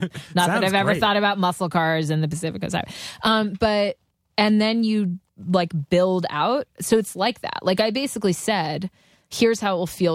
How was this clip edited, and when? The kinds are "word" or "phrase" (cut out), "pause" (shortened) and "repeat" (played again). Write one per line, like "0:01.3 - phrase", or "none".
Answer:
0:04.1 - pause
0:05.3 - pause